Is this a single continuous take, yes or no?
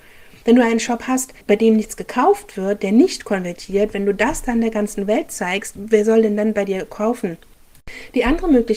no